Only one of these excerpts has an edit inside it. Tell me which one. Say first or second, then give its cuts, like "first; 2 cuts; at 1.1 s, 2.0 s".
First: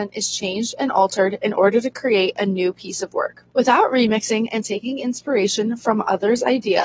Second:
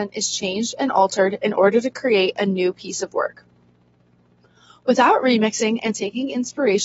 first; 1 cut; at 3.5 s